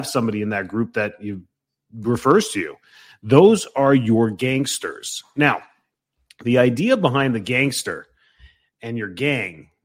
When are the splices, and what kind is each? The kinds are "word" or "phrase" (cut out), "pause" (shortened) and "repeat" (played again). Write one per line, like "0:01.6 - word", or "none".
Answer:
none